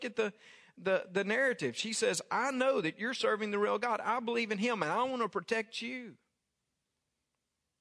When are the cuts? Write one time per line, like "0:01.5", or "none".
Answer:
none